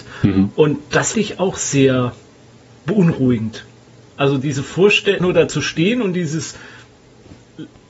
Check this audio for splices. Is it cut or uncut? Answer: cut